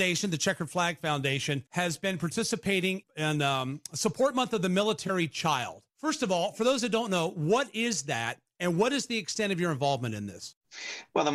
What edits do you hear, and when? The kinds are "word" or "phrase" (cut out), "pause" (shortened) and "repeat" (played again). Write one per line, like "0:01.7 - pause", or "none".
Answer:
0:01.7 - pause
0:03.0 - word
0:05.9 - pause